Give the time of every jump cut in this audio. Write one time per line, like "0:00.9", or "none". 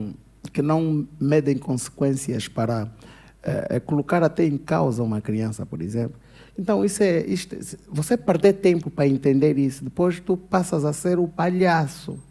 none